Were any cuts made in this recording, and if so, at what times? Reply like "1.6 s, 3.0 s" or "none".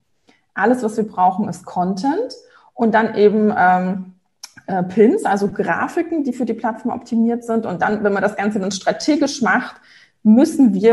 none